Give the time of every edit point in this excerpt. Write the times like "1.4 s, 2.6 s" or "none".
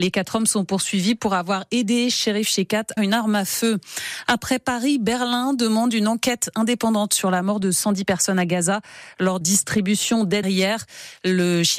3.0 s, 9.4 s, 10.4 s